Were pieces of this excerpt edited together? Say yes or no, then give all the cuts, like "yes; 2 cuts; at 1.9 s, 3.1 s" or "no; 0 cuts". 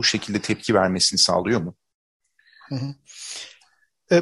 no; 0 cuts